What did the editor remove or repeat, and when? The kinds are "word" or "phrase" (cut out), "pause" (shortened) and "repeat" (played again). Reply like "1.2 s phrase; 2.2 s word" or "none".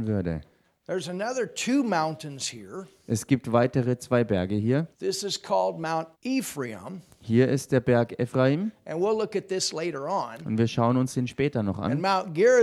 4.9 s pause; 6.1 s pause

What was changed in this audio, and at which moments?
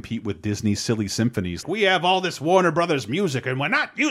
1.6 s word

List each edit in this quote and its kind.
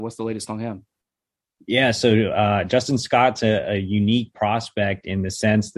none

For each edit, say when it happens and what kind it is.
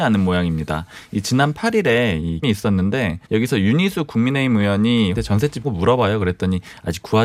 2.4 s phrase; 3.3 s pause; 5.1 s word; 5.6 s word

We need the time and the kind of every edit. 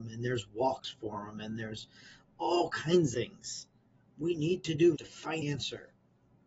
3.1 s word; 5.0 s word; 5.4 s word

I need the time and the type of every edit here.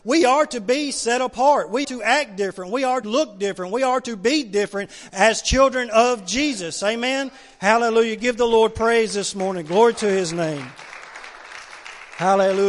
1.8 s word; 3.0 s word

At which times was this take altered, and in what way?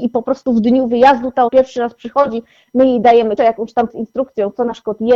1.5 s word; 3.4 s word; 3.9 s word

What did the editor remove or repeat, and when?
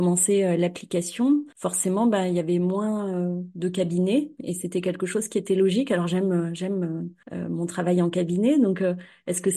1.5 s pause; 7.2 s pause

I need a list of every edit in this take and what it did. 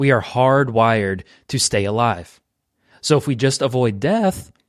none

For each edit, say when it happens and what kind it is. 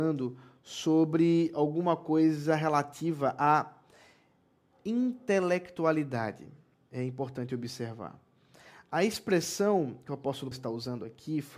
10.5 s word

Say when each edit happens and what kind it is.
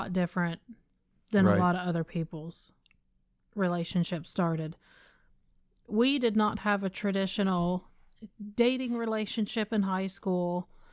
none

